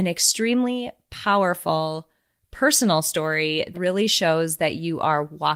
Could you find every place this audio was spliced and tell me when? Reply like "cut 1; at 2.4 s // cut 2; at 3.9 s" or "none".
cut 1; at 3.7 s